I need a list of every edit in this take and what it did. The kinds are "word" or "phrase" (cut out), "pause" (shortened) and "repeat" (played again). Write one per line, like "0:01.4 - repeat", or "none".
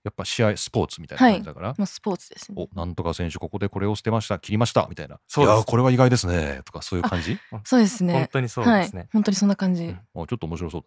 none